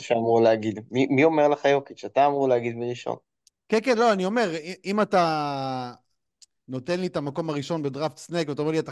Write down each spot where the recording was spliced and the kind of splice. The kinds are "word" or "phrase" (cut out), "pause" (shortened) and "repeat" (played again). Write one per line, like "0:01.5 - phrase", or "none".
none